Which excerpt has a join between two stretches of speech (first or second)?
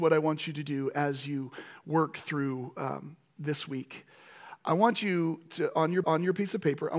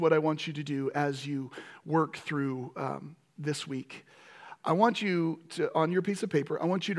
first